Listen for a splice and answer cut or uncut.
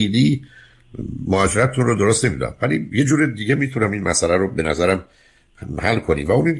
uncut